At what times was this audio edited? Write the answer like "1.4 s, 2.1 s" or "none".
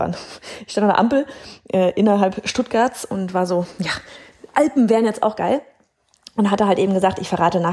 none

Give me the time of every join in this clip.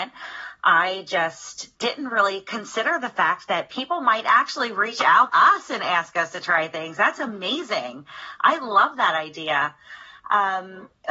1.8 s, 5.3 s

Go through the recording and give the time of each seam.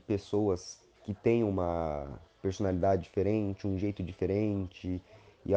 none

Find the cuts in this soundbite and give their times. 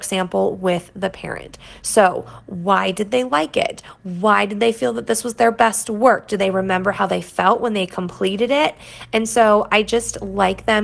none

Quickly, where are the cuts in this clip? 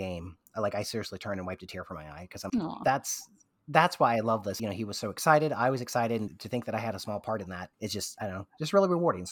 2.5 s, 4.6 s, 6.3 s, 7.7 s

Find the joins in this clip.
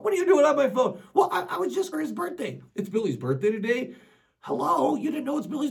1.9 s

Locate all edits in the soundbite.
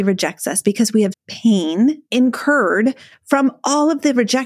1.1 s, 2.1 s

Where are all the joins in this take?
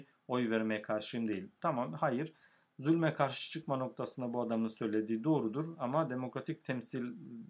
none

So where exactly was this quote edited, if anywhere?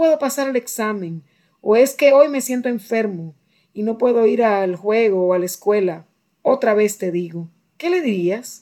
none

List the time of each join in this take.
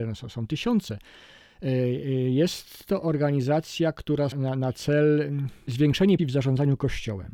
4.3 s, 6.2 s

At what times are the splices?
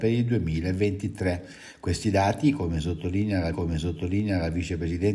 3.5 s

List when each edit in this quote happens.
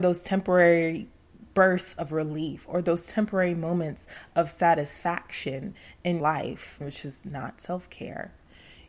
6.2 s, 6.8 s

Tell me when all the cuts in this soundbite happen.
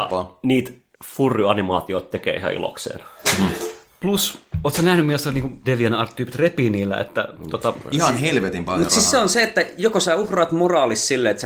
0.9 s, 5.6 s

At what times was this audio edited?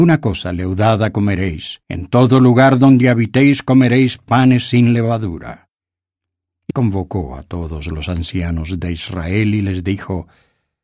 1.8 s, 6.7 s

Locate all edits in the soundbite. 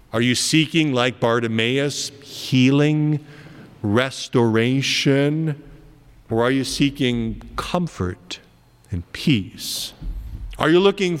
none

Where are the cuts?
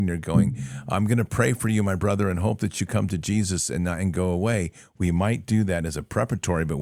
none

